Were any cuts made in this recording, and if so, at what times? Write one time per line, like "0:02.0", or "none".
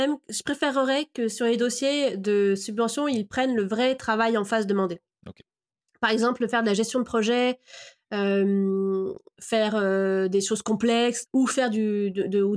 0:11.3